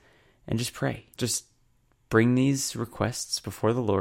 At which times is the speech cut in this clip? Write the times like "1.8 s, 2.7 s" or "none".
1.1 s